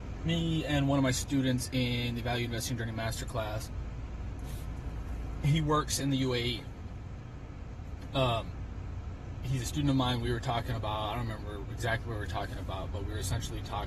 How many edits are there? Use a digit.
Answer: 0